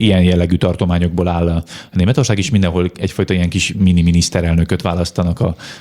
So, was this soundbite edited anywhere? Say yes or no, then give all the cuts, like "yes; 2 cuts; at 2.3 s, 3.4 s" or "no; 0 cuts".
no; 0 cuts